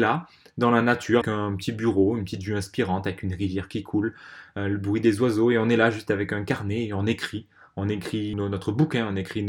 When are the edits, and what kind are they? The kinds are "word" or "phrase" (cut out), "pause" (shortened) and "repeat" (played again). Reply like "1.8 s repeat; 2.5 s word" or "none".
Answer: 1.2 s word; 8.3 s word